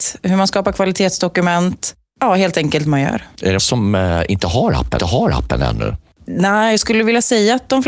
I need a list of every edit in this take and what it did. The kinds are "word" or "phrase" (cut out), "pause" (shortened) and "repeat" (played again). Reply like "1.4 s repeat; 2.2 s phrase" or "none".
2.9 s phrase; 3.6 s word; 5.0 s repeat

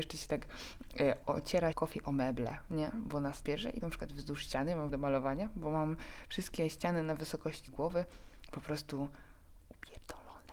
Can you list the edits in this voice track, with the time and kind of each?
1.2 s word; 1.7 s phrase; 3.4 s word; 3.8 s word; 4.9 s phrase; 7.7 s word

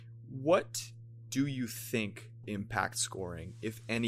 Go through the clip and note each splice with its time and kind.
1.3 s word; 2.4 s word

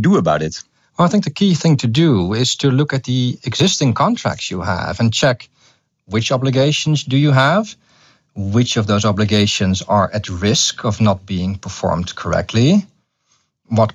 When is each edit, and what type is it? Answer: none

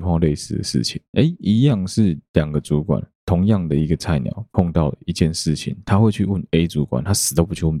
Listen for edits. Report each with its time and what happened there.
none

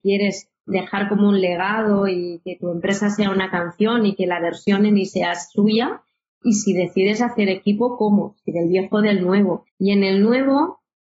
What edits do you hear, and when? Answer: 6.4 s word; 9.7 s pause

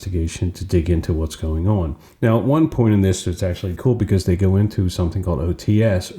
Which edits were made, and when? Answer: 3.8 s word

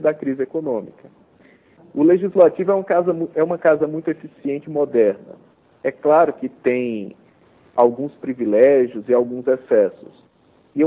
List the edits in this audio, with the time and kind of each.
none

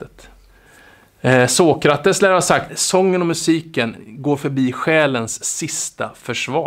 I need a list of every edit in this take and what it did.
2.7 s phrase

